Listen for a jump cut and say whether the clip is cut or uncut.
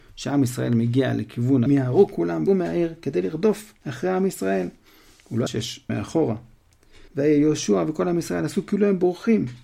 cut